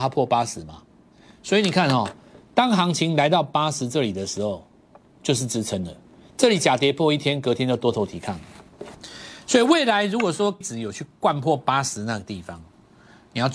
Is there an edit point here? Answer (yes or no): yes